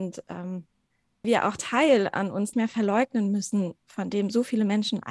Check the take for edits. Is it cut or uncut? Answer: cut